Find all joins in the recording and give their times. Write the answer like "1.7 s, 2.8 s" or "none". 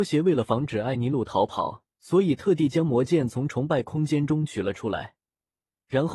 1.9 s